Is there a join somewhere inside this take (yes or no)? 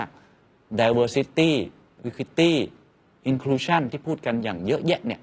no